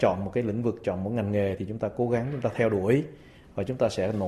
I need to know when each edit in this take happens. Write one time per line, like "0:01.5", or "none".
none